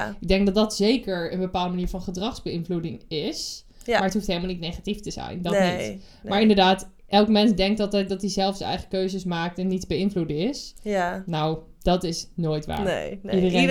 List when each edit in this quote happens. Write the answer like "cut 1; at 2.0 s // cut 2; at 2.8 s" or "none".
cut 1; at 7.0 s